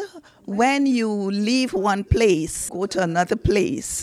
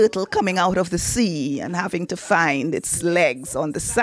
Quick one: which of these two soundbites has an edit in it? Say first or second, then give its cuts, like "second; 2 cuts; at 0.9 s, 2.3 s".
first; 1 cut; at 2.7 s